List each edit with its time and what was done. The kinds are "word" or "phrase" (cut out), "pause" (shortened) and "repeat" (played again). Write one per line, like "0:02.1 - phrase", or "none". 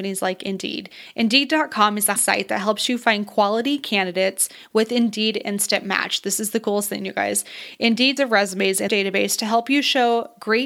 0:02.2 - word
0:08.2 - phrase
0:08.9 - word

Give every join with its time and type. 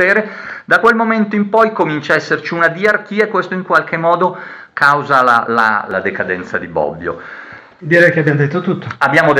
none

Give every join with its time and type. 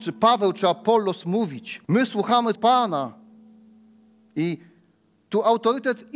0:01.8 - pause
0:02.6 - word

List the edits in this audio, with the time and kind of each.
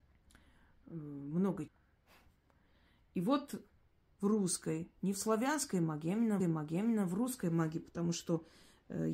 0:01.7 - word
0:03.9 - pause
0:06.4 - repeat

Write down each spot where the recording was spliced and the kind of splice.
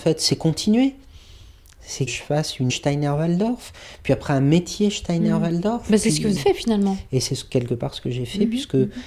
0:02.1 - word
0:02.7 - word
0:06.4 - word

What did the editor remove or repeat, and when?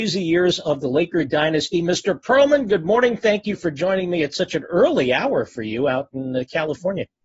none

